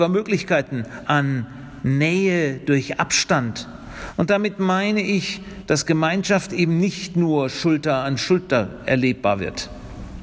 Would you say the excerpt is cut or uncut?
uncut